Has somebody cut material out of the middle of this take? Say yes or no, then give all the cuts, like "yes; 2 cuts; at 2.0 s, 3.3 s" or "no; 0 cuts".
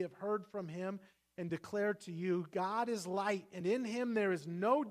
no; 0 cuts